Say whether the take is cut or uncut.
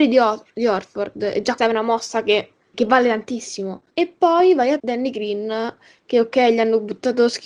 cut